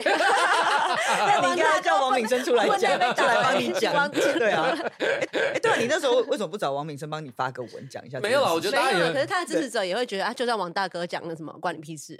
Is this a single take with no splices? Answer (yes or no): no